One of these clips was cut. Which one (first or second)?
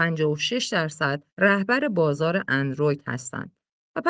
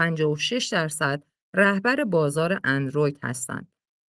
first